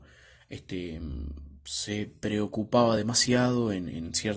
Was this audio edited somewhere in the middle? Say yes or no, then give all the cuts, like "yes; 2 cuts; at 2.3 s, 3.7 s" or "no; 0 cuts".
no; 0 cuts